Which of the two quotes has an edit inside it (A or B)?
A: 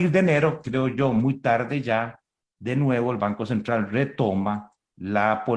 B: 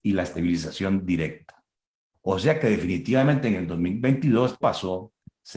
B